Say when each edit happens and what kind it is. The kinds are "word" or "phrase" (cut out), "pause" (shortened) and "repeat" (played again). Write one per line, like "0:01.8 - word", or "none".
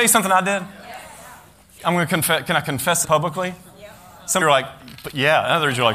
0:03.0 - word
0:04.4 - phrase